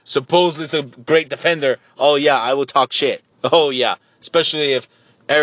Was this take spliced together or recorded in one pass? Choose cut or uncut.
cut